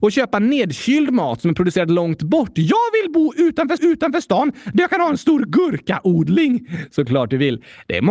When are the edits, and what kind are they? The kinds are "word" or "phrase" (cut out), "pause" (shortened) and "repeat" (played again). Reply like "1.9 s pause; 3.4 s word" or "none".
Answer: 3.8 s repeat